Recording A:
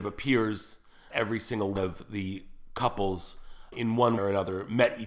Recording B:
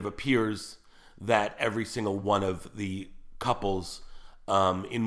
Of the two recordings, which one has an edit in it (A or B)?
A